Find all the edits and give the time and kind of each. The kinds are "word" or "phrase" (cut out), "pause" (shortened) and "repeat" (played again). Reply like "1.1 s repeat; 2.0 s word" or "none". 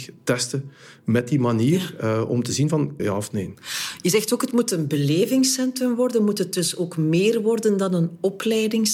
3.0 s phrase